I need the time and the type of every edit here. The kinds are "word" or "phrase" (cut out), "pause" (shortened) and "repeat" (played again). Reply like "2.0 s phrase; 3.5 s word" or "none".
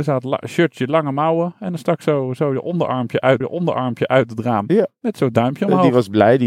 3.4 s repeat